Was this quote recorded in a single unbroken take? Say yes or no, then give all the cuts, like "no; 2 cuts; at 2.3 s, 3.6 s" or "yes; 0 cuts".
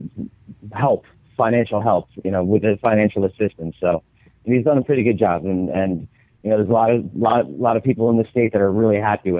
yes; 0 cuts